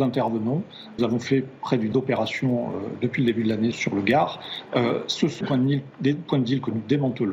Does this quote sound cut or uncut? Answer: cut